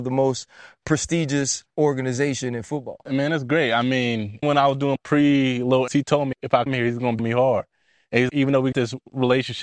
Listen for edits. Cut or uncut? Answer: cut